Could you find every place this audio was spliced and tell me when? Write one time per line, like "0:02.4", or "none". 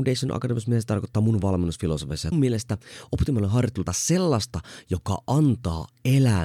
0:02.3
0:03.9